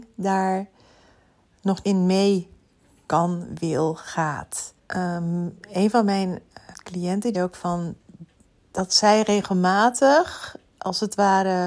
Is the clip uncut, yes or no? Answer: no